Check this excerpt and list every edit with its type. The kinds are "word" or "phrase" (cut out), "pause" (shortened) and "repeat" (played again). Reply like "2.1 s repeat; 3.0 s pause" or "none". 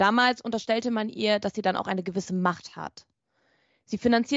none